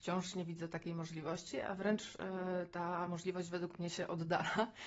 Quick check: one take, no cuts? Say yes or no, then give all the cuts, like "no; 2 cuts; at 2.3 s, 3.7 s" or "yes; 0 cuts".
yes; 0 cuts